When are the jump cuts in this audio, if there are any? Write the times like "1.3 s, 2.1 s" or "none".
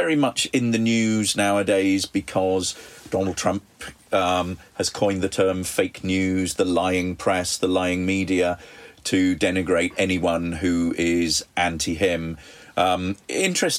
none